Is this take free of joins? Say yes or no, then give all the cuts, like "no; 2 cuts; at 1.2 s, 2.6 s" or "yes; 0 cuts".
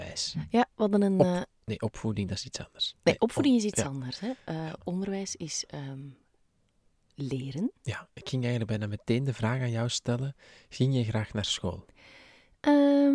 yes; 0 cuts